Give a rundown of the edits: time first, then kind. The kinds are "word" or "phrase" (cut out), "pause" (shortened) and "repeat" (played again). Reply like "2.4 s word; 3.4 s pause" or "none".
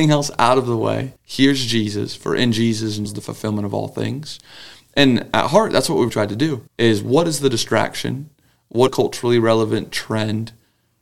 1.2 s pause; 3.1 s phrase; 6.1 s word; 6.7 s pause; 8.9 s phrase